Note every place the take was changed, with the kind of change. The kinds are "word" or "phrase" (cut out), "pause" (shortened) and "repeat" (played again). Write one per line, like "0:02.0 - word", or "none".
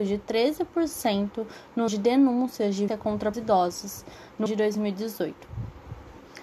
0:01.9 - word
0:02.9 - word
0:03.3 - word
0:04.5 - word

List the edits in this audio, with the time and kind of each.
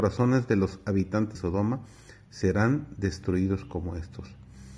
0:01.3 - word

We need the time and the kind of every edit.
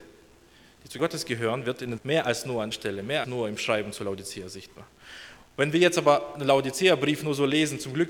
0:01.0 - word
0:02.0 - word
0:02.7 - word
0:03.2 - word

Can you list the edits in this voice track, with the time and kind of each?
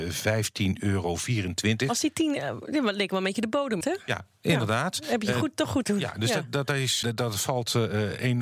0:03.8 - word
0:05.8 - word
0:07.0 - word

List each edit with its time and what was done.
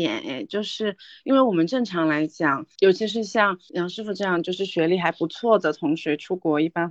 none

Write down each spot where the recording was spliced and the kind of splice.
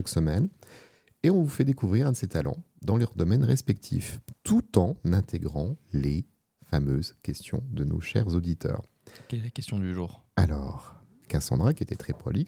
none

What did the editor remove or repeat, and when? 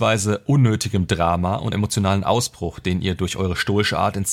0:01.7 - word

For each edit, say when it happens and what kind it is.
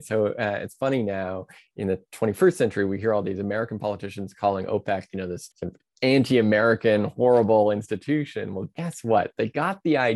0:05.5 - pause

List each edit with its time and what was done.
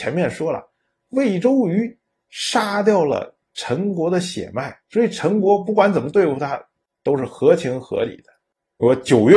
0:04.8 - pause

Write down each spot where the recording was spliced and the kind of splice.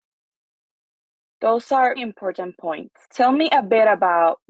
0:02.0 - word
0:03.0 - pause

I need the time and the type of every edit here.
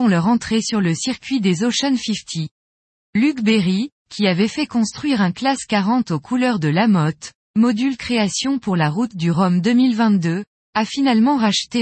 none

